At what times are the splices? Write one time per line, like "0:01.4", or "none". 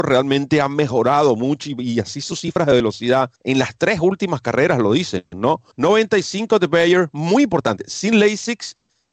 0:03.4
0:05.7